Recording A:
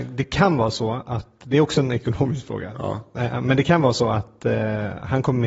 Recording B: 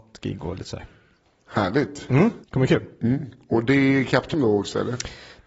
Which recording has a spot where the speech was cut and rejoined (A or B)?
B